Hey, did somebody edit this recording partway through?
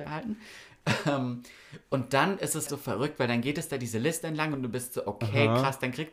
yes; 1 cut; at 2.7 s

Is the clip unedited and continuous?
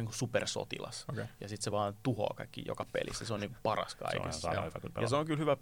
yes; 0 cuts

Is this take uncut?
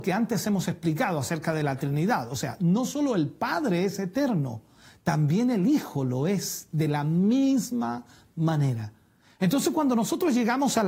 yes; 0 cuts

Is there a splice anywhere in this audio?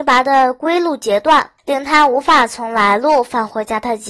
yes; 1 cut; at 1.6 s

